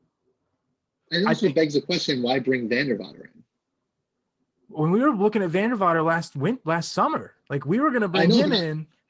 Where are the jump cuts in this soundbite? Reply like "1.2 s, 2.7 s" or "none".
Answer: none